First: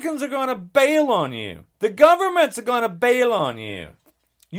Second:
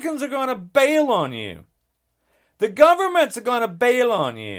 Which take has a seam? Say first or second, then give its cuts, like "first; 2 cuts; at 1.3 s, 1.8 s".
first; 1 cut; at 1.7 s